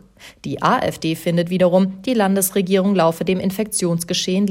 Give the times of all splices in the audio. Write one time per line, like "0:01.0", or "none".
none

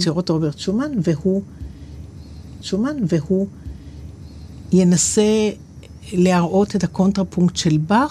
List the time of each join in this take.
0:02.6

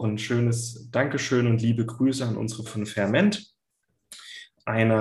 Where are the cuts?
0:02.7

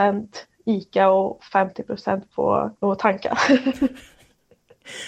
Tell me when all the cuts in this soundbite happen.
0:02.8

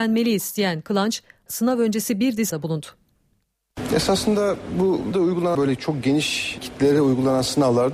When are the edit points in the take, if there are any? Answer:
0:01.5
0:02.5
0:05.1
0:05.5
0:06.6

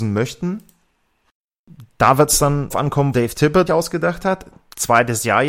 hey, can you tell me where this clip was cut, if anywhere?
0:02.7
0:03.1
0:03.7

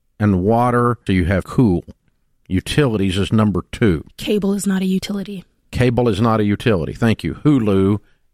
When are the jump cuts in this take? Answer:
0:01.1
0:01.4

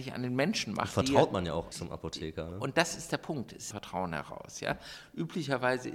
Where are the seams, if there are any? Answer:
0:01.7
0:03.7

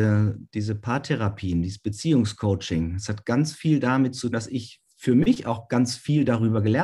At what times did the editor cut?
0:04.3

